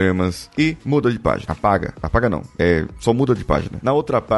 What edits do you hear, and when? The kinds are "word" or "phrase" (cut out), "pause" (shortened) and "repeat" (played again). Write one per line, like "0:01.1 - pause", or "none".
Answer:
none